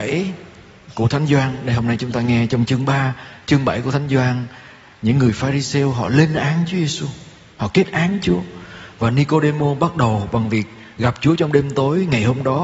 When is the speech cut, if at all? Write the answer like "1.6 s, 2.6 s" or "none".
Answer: none

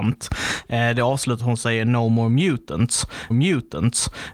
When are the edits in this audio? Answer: 1.4 s, 3.3 s

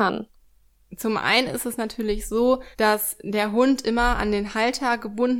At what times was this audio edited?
2.7 s

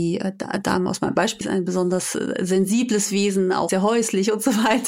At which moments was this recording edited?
1.4 s, 3.7 s

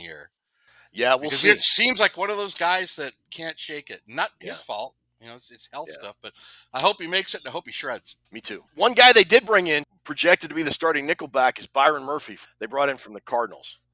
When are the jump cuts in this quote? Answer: 8.3 s, 8.7 s

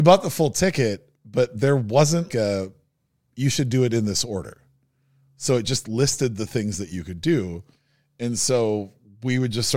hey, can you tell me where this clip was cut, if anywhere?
2.3 s

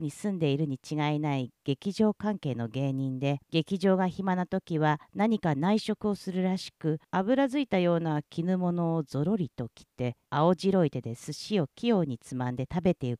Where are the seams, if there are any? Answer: 3.4 s, 7.0 s, 10.3 s

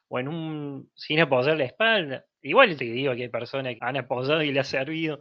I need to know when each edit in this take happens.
2.8 s, 3.8 s

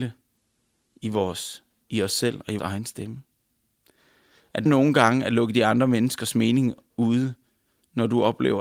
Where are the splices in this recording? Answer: 2.6 s, 4.7 s

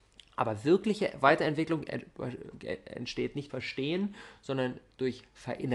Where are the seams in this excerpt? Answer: 3.5 s

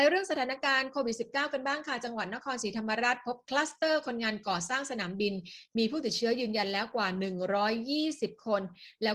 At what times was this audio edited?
none

